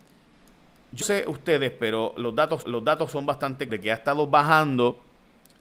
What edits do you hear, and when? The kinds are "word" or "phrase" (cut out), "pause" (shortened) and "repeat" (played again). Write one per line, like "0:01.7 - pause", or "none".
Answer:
0:01.0 - word
0:02.6 - repeat
0:03.7 - word